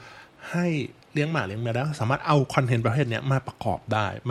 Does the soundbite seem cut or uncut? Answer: cut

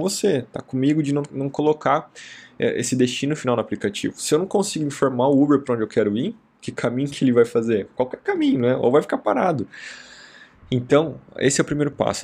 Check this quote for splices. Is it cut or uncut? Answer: uncut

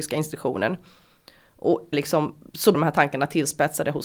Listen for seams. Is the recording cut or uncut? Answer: cut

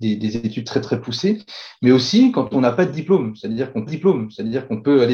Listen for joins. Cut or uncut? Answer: cut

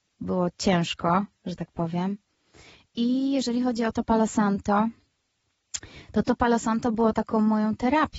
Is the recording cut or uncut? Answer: uncut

